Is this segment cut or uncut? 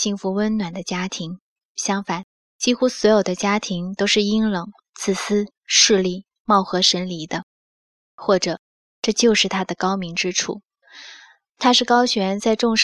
uncut